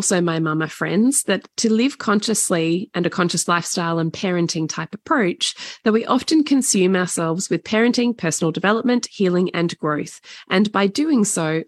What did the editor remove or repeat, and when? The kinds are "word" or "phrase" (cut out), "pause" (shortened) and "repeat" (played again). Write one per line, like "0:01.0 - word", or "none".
none